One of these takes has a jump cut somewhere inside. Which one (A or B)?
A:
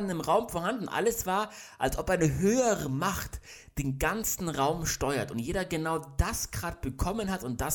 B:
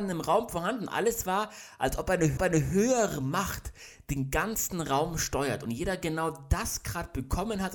B